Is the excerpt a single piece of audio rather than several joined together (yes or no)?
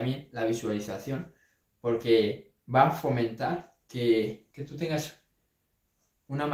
no